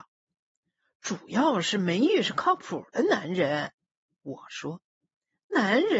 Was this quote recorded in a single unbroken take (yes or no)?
yes